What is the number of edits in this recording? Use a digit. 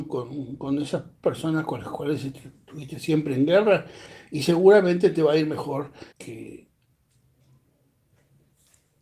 1